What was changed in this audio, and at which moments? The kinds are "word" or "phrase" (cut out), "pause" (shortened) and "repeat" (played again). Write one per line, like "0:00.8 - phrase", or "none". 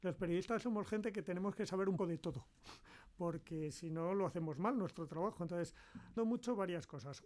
0:02.0 - word
0:06.2 - word